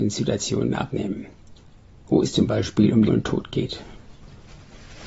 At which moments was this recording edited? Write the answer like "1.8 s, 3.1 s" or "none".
3.1 s